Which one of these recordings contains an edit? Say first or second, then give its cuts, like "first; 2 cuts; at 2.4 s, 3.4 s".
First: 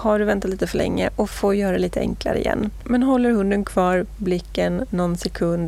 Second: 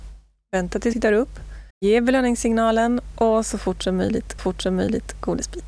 second; 3 cuts; at 0.9 s, 1.7 s, 4.4 s